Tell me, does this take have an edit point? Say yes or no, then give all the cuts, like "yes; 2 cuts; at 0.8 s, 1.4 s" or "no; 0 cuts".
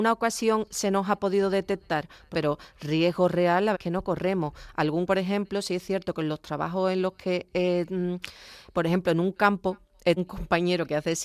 yes; 4 cuts; at 2.3 s, 3.7 s, 5.1 s, 10.2 s